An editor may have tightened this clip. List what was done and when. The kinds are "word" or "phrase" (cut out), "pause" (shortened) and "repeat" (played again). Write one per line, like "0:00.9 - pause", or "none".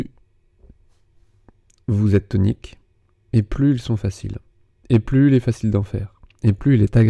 none